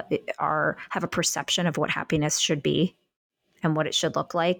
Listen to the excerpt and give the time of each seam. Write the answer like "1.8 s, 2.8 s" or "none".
none